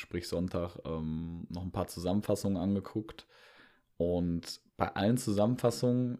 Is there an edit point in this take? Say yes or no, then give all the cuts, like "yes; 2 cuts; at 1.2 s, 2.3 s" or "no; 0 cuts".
no; 0 cuts